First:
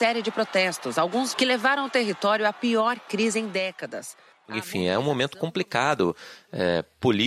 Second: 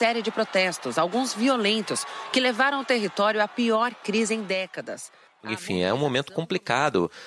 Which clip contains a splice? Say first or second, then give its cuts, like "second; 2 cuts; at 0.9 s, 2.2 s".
first; 1 cut; at 1.3 s